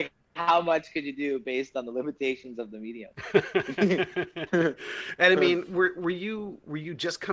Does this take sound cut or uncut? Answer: uncut